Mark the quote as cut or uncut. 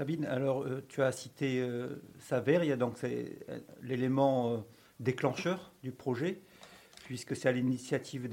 uncut